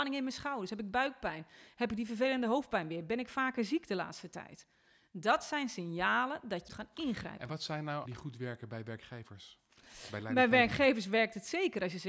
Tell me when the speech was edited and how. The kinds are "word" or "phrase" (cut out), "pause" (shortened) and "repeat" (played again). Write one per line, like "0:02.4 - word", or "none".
0:06.7 - word
0:08.1 - word